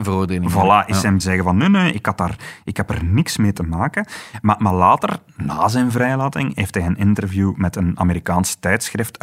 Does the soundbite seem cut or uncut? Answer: cut